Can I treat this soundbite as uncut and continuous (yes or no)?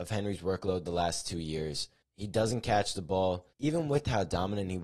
no